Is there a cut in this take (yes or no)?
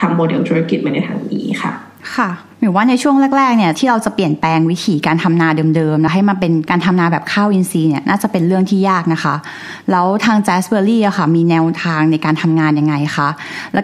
yes